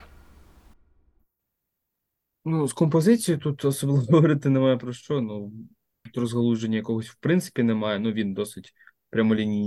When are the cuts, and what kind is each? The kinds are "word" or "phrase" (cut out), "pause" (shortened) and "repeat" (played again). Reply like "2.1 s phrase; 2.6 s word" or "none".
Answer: none